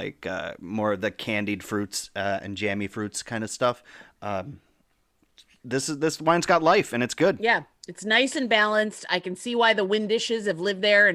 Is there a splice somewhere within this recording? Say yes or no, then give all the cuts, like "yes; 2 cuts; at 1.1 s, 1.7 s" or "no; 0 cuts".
no; 0 cuts